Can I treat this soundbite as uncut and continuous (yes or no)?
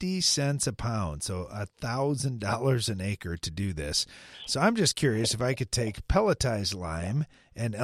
yes